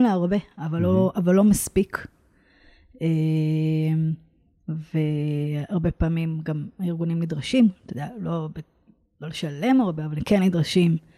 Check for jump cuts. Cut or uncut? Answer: uncut